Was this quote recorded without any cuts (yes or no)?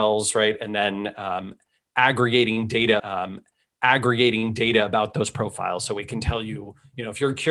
no